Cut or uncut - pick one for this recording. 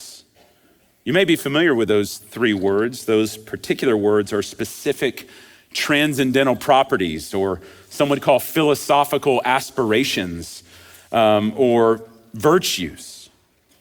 uncut